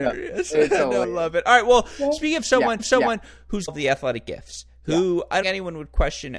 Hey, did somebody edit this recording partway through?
yes; 4 cuts; at 1.0 s, 2.8 s, 3.7 s, 5.4 s

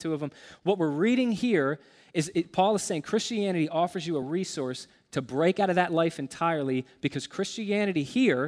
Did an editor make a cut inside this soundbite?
no; 0 cuts

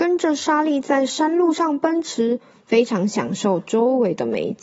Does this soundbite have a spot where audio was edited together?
no; 0 cuts

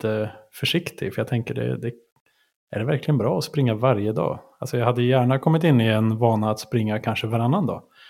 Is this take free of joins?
yes; 0 cuts

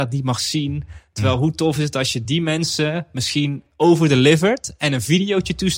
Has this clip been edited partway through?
no; 0 cuts

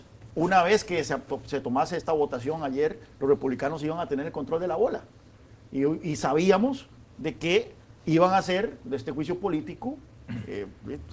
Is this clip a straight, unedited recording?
yes; 0 cuts

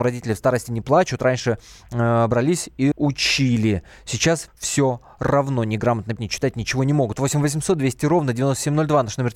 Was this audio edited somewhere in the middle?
yes; 3 cuts; at 2.9 s, 4.5 s, 6.2 s

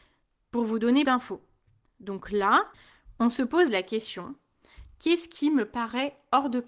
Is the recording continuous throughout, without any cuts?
no; 1 cut; at 1.0 s

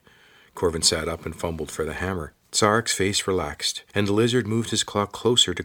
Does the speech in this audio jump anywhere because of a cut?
yes; 1 cut; at 3.9 s

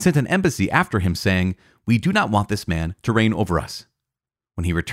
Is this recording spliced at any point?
no; 0 cuts

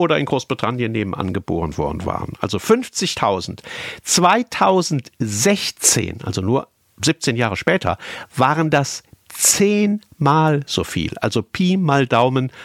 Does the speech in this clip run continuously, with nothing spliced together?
yes; 0 cuts

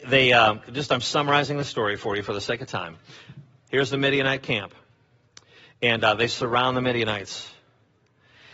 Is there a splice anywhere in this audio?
no; 0 cuts

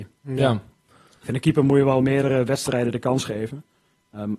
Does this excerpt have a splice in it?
no; 0 cuts

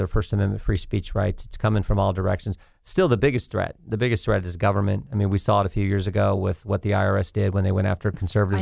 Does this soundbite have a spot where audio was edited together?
no; 0 cuts

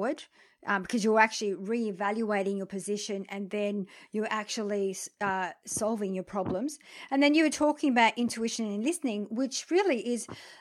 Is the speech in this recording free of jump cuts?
yes; 0 cuts

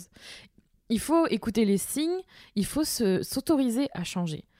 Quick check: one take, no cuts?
yes; 0 cuts

